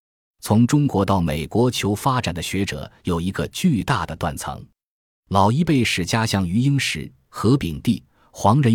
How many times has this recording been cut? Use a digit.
0